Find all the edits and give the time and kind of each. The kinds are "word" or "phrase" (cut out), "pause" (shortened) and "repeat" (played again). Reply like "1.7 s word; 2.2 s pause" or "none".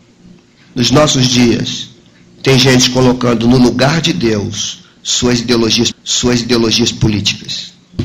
5.9 s repeat